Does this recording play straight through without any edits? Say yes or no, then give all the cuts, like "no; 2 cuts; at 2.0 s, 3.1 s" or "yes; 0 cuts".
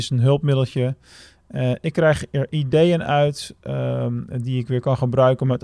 yes; 0 cuts